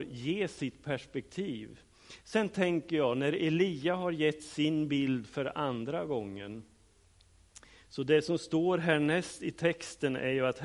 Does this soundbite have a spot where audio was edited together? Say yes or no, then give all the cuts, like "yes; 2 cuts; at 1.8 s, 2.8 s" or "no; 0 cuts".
no; 0 cuts